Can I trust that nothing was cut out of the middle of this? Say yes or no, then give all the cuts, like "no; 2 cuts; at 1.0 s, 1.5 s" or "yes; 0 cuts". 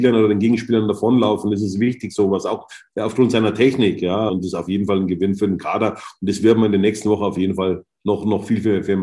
no; 1 cut; at 4.3 s